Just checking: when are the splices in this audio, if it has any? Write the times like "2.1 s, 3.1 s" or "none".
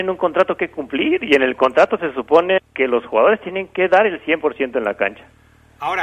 2.6 s